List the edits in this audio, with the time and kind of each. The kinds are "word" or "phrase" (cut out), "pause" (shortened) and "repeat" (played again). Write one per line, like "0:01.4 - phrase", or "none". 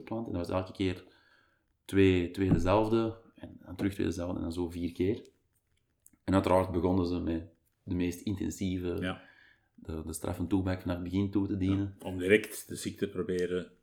none